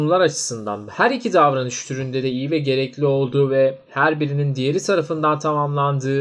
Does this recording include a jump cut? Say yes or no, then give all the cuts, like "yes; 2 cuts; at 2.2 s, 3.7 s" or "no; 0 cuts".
no; 0 cuts